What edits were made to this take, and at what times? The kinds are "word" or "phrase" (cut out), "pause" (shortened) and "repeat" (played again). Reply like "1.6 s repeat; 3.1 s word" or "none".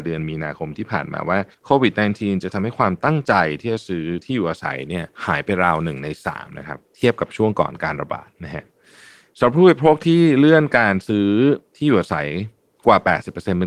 1.5 s pause; 5.1 s pause; 8.3 s pause